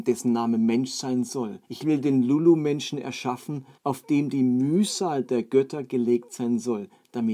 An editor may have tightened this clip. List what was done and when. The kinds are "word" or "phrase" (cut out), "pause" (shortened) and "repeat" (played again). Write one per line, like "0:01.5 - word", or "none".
0:01.6 - pause
0:03.8 - pause